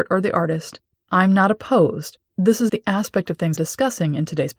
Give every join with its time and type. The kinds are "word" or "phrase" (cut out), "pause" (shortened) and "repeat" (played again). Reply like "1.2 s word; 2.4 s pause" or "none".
2.3 s word; 2.7 s word; 3.6 s word